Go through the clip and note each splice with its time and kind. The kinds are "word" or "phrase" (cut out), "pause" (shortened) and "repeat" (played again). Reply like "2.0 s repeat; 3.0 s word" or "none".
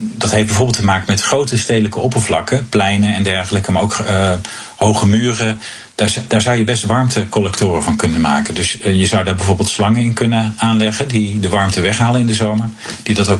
none